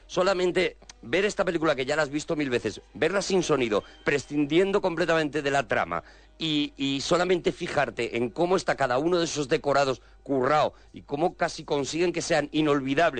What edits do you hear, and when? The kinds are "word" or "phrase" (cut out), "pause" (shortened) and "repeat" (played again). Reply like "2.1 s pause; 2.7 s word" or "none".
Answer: none